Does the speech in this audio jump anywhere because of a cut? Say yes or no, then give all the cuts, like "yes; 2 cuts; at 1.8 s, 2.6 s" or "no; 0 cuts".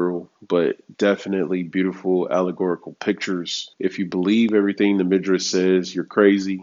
yes; 2 cuts; at 0.9 s, 3.7 s